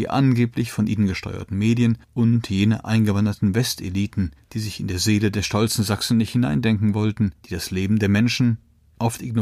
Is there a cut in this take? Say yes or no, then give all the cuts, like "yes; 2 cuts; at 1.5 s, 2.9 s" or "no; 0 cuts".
yes; 3 cuts; at 2.0 s, 4.4 s, 7.4 s